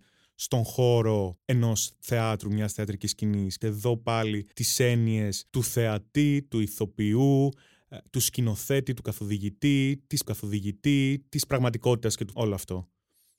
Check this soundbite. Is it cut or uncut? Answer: cut